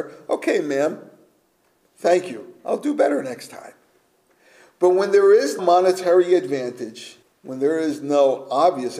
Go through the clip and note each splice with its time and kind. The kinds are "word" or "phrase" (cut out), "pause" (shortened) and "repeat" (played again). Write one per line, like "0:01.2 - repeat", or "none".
0:05.6 - word
0:07.2 - pause